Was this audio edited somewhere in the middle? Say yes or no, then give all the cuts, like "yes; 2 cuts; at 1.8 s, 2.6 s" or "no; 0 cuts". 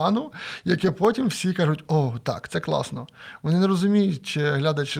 no; 0 cuts